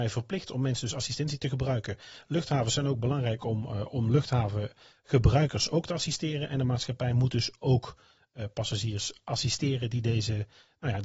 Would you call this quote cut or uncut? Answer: uncut